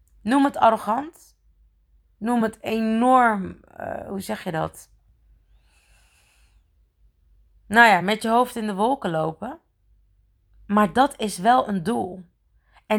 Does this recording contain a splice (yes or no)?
no